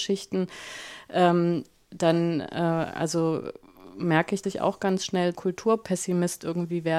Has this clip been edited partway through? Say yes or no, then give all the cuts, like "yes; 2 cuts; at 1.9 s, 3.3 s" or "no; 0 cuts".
yes; 2 cuts; at 4.4 s, 5.3 s